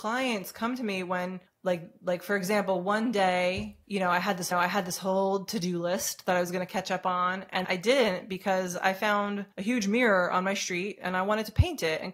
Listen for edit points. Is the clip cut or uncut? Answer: cut